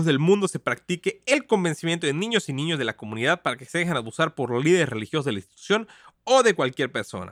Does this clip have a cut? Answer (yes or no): no